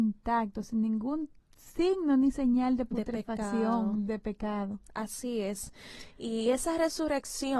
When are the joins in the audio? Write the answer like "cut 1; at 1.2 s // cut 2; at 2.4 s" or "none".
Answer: none